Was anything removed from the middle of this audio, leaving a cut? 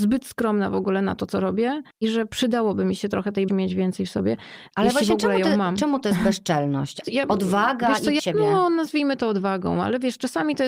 yes; 5 cuts; at 1.9 s, 3.5 s, 4.7 s, 7.0 s, 8.2 s

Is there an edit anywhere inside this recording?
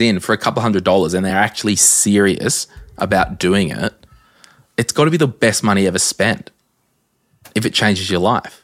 no; 0 cuts

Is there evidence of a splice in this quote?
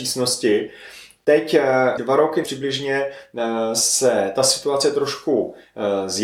yes; 2 cuts; at 2.0 s, 2.4 s

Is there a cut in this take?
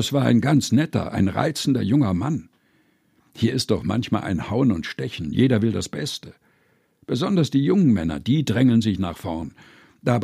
no; 0 cuts

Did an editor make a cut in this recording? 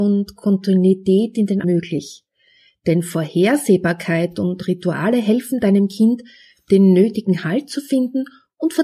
yes; 1 cut; at 1.6 s

